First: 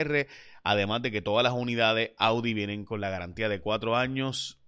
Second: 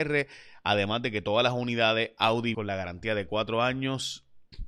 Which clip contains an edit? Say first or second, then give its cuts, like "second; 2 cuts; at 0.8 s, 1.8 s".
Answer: second; 1 cut; at 2.5 s